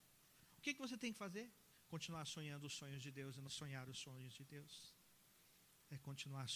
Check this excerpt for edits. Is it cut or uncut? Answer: cut